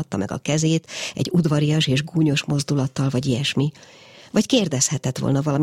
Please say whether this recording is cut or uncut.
uncut